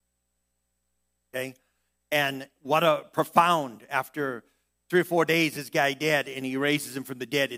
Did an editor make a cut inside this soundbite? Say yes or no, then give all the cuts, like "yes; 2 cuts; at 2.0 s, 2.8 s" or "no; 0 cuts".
no; 0 cuts